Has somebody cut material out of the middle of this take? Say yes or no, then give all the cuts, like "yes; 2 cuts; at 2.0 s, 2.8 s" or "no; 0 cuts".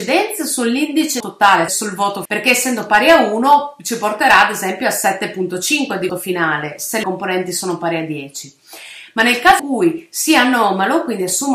yes; 6 cuts; at 1.2 s, 1.7 s, 2.3 s, 6.1 s, 7.0 s, 9.6 s